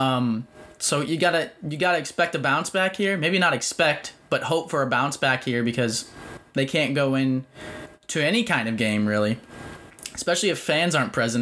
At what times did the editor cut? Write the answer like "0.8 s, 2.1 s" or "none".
none